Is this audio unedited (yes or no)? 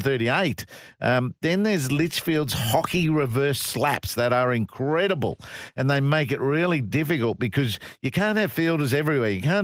yes